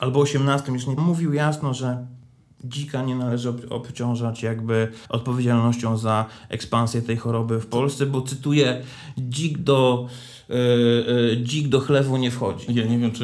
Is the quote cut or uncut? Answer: cut